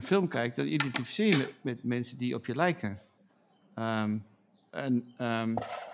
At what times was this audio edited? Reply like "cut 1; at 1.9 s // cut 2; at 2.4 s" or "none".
none